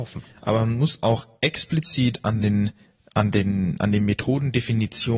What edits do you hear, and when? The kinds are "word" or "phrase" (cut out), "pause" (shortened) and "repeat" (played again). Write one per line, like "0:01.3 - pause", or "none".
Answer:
none